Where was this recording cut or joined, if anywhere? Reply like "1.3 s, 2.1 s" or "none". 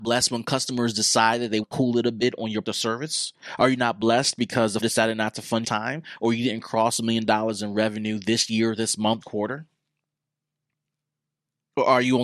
1.6 s, 2.6 s, 4.8 s, 5.6 s, 9.2 s